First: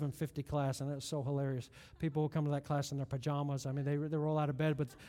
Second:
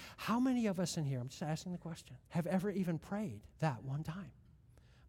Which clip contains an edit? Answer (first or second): second